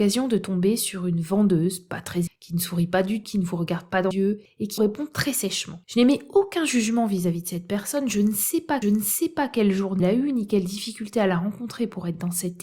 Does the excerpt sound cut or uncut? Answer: cut